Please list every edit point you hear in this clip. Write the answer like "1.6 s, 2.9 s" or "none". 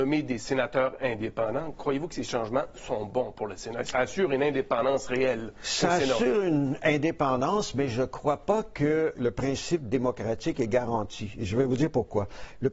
3.9 s, 9.1 s